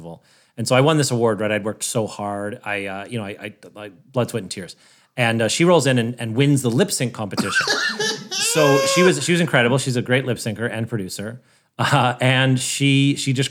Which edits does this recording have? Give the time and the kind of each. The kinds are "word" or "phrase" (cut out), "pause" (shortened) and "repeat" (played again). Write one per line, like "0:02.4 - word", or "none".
none